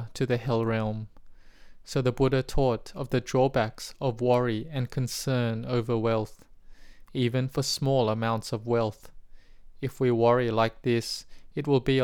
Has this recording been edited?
no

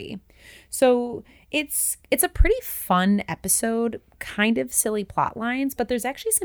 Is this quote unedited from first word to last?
yes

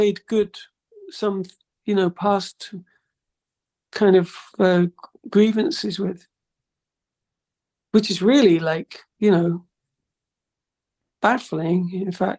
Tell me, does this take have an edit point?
no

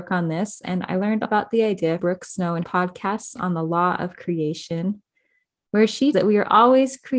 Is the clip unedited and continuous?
no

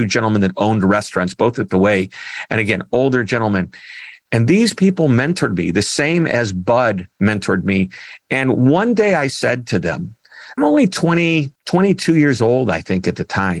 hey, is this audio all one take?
no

